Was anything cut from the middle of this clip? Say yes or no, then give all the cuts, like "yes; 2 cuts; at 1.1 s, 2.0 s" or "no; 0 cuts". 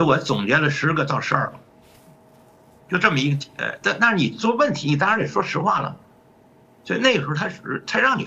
no; 0 cuts